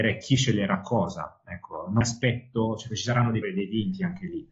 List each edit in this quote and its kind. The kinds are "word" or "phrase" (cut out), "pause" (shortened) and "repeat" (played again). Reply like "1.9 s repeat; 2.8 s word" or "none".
2.0 s word; 2.9 s word; 3.4 s word